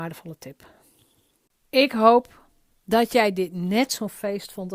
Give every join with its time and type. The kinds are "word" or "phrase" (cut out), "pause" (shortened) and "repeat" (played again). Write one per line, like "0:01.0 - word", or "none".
none